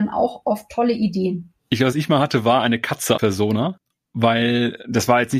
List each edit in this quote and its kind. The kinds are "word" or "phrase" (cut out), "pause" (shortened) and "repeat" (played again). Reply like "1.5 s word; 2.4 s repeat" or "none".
1.6 s pause; 1.9 s phrase; 3.2 s word